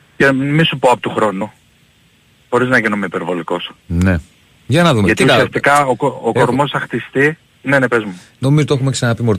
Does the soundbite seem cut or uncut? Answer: uncut